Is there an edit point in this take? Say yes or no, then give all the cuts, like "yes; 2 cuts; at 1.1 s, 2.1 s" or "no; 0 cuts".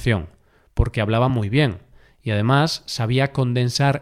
no; 0 cuts